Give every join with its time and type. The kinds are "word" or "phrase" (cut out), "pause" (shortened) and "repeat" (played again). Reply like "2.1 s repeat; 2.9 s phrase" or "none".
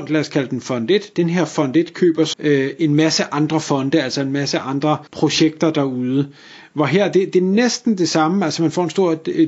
2.3 s word; 5.1 s pause